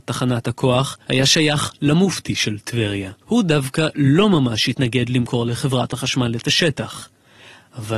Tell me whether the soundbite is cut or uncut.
cut